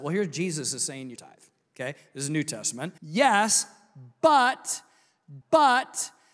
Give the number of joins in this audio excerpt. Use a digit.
3